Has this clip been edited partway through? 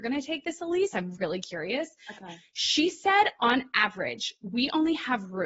no; 0 cuts

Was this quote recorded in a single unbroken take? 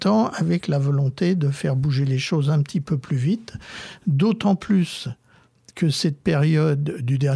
yes; 0 cuts

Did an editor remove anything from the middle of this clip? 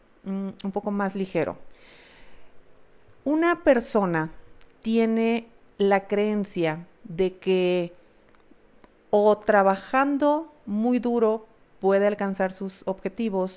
no; 0 cuts

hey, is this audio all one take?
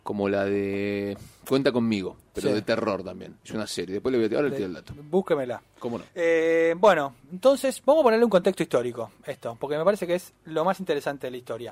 no; 2 cuts; at 3.4 s, 6.1 s

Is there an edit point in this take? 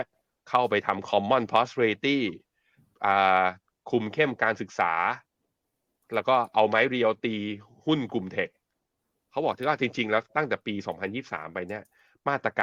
no; 0 cuts

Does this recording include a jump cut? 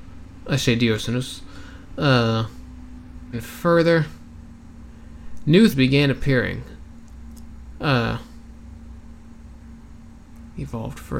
yes; 2 cuts; at 3.3 s, 5.7 s

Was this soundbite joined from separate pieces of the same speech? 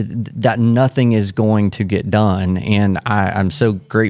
no; 0 cuts

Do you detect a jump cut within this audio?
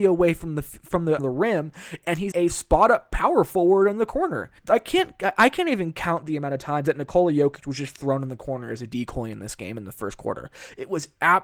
yes; 3 cuts; at 1.2 s, 2.3 s, 4.6 s

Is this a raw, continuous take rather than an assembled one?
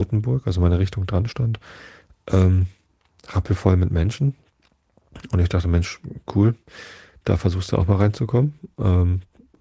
yes; 0 cuts

